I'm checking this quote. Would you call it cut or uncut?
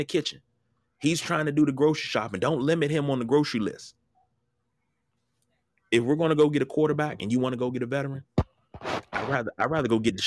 uncut